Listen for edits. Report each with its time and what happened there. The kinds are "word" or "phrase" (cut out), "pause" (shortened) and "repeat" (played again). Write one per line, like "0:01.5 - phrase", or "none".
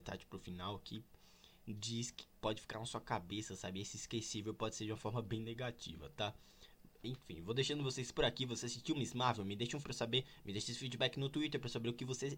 0:09.8 - word